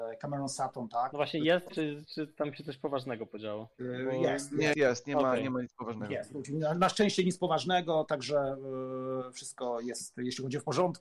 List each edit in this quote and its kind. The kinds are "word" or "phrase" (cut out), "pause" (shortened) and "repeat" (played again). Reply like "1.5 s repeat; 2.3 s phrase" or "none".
1.7 s phrase; 4.7 s word